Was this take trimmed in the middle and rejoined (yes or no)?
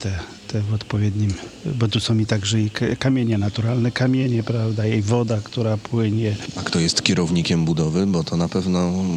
no